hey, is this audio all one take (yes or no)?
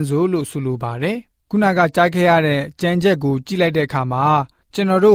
no